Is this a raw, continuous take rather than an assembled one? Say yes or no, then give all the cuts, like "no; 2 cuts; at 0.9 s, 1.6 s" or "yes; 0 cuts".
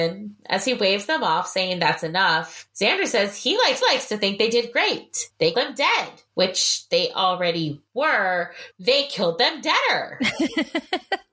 no; 3 cuts; at 3.8 s, 5.5 s, 8.7 s